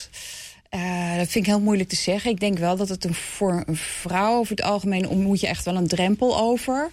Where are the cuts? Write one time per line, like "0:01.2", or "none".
none